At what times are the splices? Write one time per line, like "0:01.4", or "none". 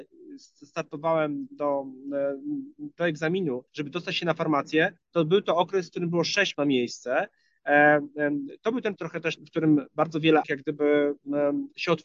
0:01.5
0:03.7
0:05.0
0:06.5
0:09.0
0:09.4
0:10.4